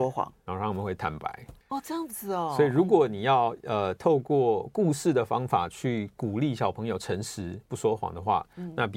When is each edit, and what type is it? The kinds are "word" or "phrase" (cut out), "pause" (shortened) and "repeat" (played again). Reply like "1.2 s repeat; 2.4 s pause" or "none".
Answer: 1.6 s pause